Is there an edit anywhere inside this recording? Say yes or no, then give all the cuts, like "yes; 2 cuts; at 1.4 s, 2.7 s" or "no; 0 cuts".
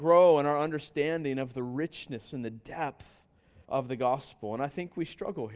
yes; 1 cut; at 3.6 s